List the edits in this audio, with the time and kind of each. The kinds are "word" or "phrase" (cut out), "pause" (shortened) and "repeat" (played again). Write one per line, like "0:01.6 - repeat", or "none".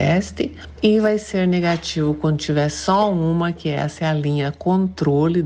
none